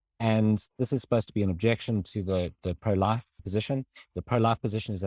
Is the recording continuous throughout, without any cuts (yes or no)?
yes